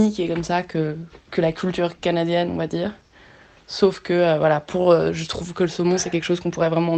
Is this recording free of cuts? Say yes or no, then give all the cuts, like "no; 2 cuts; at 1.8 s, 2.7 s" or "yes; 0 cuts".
yes; 0 cuts